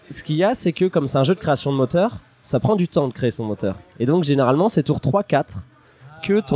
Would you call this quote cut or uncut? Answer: uncut